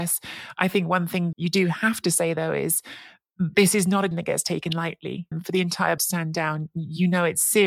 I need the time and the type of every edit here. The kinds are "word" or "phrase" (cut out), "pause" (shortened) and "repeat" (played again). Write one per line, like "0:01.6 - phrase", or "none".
0:01.3 - word
0:04.1 - word
0:05.3 - word
0:06.0 - word